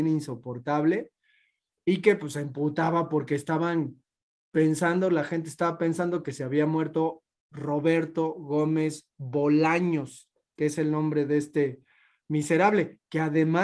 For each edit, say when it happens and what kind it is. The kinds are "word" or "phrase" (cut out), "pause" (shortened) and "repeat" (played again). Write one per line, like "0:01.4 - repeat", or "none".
none